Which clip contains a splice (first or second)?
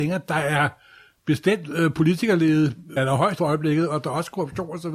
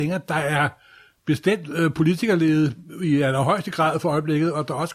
first